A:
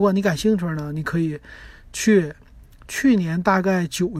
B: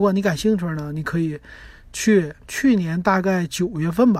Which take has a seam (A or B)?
B